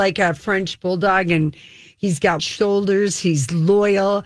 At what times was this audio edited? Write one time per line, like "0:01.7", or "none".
0:02.4